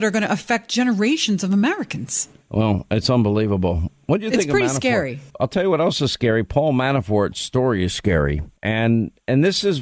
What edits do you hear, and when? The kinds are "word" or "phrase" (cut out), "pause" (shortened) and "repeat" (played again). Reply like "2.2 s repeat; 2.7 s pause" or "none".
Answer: 5.3 s pause; 8.6 s pause